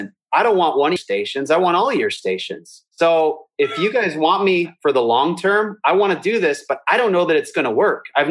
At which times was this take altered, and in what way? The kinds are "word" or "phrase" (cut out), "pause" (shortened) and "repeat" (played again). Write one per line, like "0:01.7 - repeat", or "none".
0:01.0 - word
0:02.9 - pause